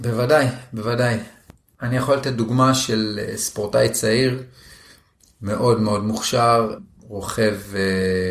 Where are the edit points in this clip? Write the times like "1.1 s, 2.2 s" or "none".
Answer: none

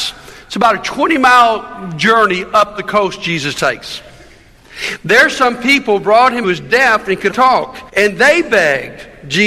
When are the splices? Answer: 6.4 s, 7.3 s, 7.9 s

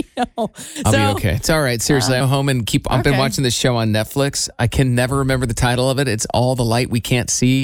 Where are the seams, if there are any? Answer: 2.2 s

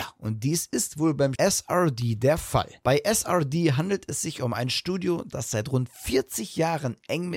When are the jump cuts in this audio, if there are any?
1.4 s

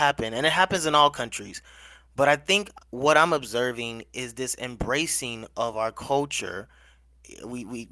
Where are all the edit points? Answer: none

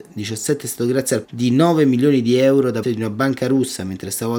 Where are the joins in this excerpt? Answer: 1.2 s, 2.8 s

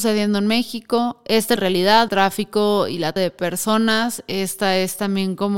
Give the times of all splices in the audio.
1.6 s, 2.1 s, 3.2 s

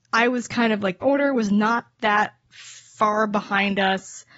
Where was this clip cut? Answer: 1.0 s, 2.4 s

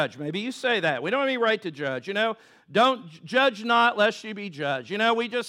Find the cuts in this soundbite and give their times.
none

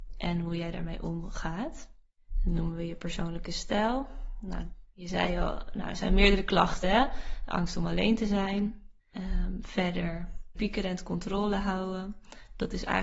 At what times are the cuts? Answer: 9.0 s, 10.6 s

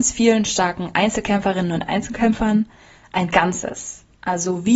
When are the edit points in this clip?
none

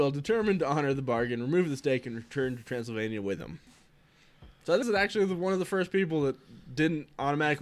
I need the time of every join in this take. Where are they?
4.8 s

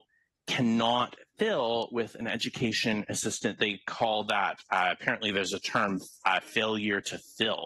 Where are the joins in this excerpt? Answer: none

